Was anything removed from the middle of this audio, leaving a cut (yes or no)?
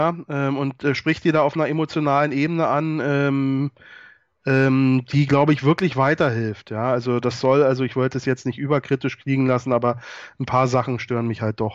no